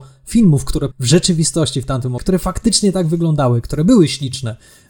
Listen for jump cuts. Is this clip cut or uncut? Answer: cut